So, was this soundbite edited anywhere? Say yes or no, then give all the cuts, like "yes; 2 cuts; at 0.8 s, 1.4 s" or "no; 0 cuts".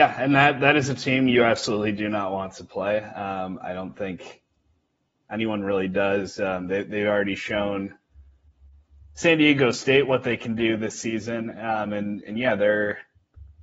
no; 0 cuts